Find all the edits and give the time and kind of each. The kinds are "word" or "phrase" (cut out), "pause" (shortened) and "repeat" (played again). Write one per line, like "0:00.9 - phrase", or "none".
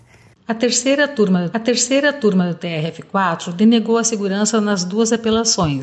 0:01.5 - repeat